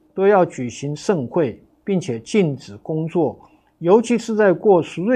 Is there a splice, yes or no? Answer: no